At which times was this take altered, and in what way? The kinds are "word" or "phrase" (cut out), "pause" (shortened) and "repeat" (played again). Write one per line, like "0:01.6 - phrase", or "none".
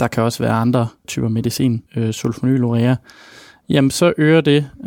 0:01.0 - word
0:01.9 - pause

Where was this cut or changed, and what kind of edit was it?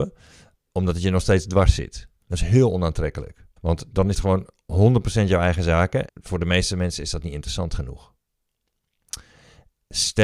0:03.6 - pause
0:04.1 - word
0:06.1 - word

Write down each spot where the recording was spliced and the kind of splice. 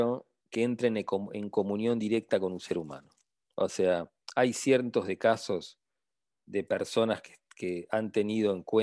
none

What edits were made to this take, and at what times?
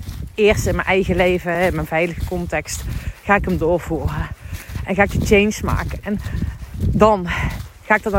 none

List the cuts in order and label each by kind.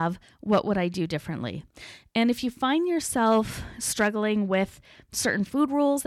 none

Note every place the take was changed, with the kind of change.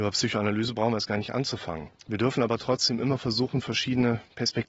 0:02.0 - pause

